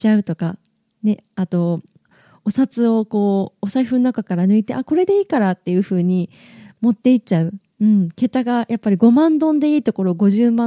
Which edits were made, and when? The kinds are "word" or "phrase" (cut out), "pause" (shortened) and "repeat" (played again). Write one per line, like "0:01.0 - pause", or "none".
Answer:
none